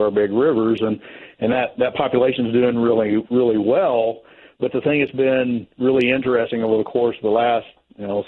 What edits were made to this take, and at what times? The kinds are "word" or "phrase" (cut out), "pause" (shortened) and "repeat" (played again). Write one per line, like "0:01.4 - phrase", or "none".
none